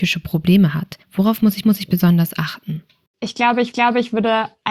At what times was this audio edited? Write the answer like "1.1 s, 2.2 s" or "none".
1.0 s, 1.6 s, 3.7 s